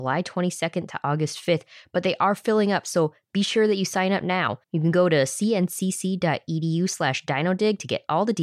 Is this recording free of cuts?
no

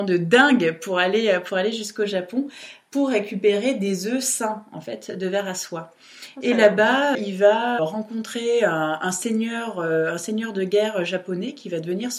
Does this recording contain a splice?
yes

